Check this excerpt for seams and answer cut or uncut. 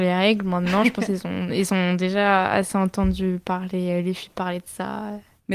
uncut